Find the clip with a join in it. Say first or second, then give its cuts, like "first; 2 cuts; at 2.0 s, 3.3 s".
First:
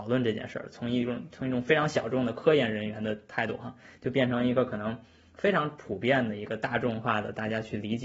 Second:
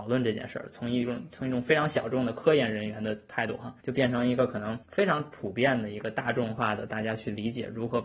second; 2 cuts; at 3.8 s, 4.8 s